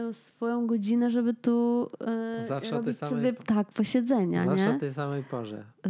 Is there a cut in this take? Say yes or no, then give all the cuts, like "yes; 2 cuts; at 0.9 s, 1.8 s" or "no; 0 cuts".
no; 0 cuts